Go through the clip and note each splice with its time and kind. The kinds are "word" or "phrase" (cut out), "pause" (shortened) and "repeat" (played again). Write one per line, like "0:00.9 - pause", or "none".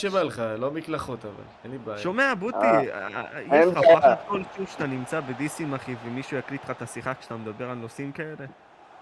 0:01.6 - pause